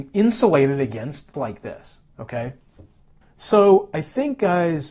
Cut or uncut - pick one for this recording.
cut